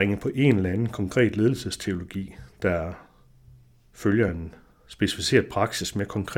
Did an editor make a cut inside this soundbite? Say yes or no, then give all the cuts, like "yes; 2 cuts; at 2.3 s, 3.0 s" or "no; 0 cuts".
no; 0 cuts